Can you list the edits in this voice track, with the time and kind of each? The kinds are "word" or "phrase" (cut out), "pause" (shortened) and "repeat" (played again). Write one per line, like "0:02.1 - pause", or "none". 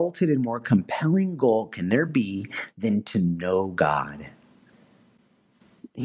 none